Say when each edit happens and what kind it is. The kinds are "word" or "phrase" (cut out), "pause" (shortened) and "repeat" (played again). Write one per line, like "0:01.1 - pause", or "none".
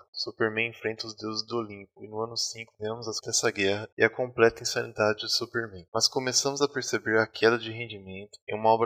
0:03.2 - word